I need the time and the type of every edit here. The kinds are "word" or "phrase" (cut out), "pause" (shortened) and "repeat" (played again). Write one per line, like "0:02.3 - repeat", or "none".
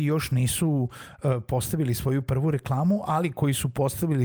none